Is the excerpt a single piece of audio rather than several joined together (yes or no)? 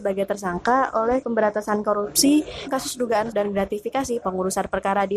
no